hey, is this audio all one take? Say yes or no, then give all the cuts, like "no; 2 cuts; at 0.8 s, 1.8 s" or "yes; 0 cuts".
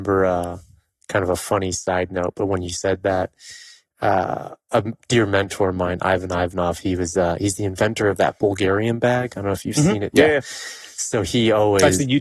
yes; 0 cuts